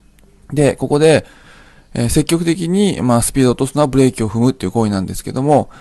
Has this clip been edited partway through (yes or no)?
no